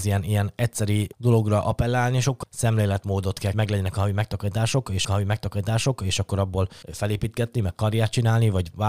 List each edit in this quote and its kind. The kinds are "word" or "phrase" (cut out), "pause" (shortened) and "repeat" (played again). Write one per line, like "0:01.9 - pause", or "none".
0:01.1 - pause
0:02.4 - phrase
0:03.5 - phrase
0:05.0 - repeat
0:06.8 - pause